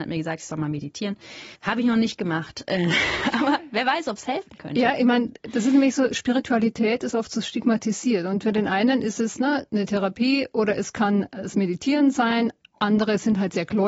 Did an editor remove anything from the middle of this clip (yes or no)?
yes